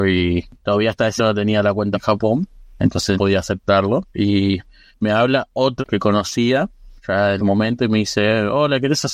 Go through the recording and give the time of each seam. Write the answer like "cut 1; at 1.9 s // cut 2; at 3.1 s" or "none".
cut 1; at 1.2 s // cut 2; at 1.9 s // cut 3; at 3.2 s // cut 4; at 5.8 s // cut 5; at 7.4 s